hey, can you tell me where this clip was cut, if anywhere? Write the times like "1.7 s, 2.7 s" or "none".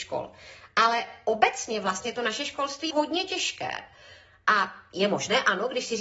2.9 s